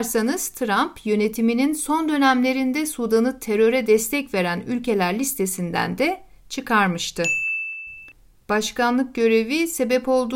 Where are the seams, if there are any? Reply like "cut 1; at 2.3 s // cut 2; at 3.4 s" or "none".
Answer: none